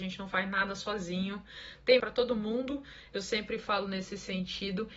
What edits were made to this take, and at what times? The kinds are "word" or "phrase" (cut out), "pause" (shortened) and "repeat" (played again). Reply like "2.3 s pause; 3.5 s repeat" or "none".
2.0 s word